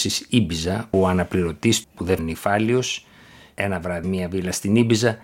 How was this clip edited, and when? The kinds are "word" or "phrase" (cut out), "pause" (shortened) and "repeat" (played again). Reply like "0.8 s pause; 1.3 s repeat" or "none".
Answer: 0.9 s word; 1.8 s word; 2.2 s word; 4.0 s word

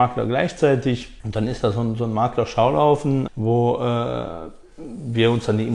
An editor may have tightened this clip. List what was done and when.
1.2 s pause; 3.3 s word

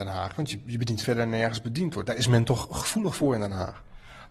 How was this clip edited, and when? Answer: 1.0 s phrase

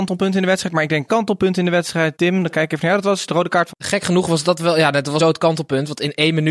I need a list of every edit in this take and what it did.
1.1 s word; 2.2 s word; 3.7 s word; 5.2 s word

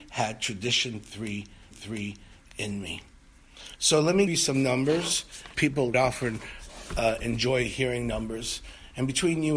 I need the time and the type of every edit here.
1.7 s repeat; 4.3 s word; 5.5 s word; 5.9 s word

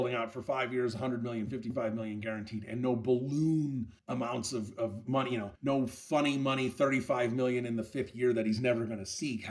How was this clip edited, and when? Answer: 4.0 s pause; 5.5 s pause

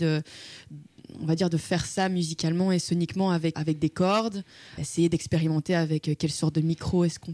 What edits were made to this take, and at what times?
3.5 s word; 4.8 s word

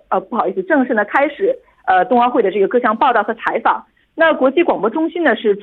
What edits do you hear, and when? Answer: none

